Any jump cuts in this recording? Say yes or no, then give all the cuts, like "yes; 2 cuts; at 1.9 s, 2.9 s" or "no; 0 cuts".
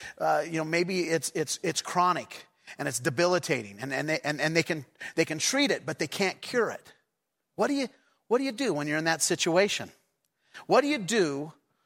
no; 0 cuts